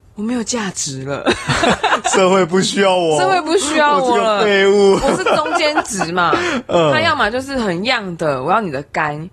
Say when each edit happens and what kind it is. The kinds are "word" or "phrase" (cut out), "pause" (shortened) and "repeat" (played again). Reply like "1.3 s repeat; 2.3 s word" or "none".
none